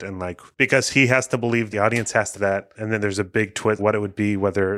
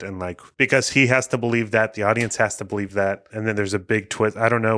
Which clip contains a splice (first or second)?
first